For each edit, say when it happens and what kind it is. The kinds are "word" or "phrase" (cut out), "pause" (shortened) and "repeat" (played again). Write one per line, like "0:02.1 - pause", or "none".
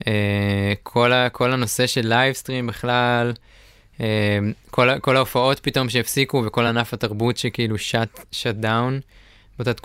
none